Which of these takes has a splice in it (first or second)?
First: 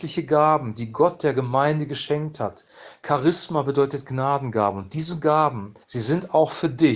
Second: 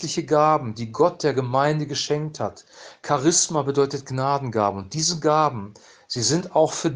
first